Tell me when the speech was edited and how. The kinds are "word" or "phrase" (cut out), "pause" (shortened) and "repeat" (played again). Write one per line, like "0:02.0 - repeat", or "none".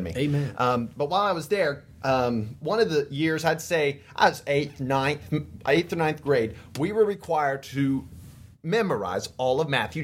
none

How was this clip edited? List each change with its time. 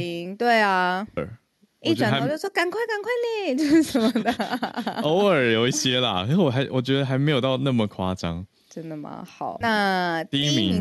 0:01.2 - phrase
0:09.6 - word

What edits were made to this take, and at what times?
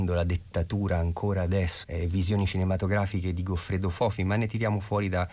0:01.8 - word

